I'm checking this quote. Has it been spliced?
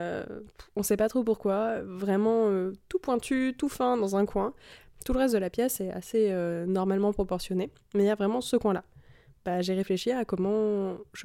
no; 0 cuts

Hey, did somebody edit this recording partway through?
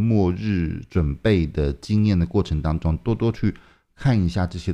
no; 0 cuts

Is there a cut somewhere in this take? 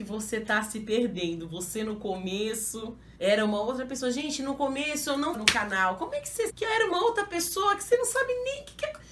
yes; 3 cuts; at 3.2 s, 5.3 s, 6.5 s

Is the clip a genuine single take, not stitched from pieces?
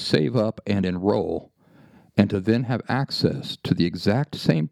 yes; 0 cuts

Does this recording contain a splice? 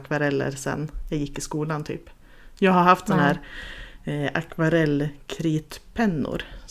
no; 0 cuts

